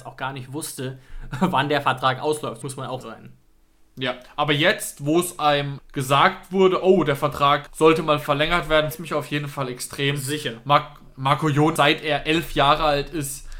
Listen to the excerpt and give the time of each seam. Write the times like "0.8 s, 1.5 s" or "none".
2.6 s, 3.0 s, 5.8 s, 7.7 s, 8.9 s, 11.8 s